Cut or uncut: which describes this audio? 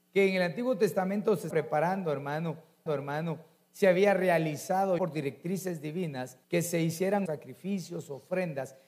cut